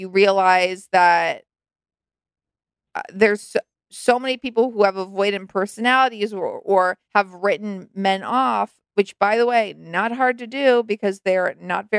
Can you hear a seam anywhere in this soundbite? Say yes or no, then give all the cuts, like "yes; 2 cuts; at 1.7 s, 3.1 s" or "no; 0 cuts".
yes; 2 cuts; at 3.7 s, 7.0 s